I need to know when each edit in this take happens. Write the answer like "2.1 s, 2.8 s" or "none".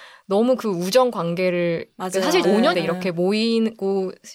2.4 s, 2.7 s